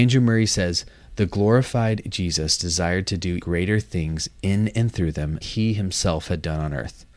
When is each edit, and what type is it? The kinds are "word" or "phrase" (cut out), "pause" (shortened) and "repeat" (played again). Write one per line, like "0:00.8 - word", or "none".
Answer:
0:03.4 - word
0:05.4 - word